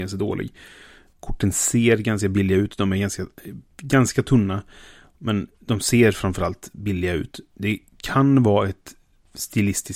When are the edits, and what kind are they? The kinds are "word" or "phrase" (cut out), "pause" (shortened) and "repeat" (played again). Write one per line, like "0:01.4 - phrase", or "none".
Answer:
none